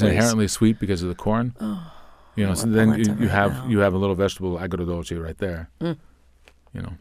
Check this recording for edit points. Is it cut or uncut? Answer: uncut